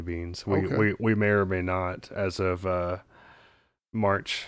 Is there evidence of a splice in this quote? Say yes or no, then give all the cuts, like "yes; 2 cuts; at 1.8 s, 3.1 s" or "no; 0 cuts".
no; 0 cuts